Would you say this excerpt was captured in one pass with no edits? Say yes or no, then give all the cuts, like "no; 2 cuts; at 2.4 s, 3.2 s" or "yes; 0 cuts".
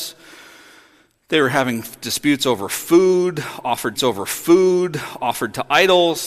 no; 1 cut; at 4.0 s